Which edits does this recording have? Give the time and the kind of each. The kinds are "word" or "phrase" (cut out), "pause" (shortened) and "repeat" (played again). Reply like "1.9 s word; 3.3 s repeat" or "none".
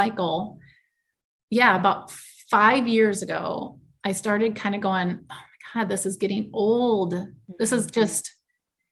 none